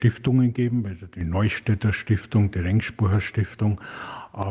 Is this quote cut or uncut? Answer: uncut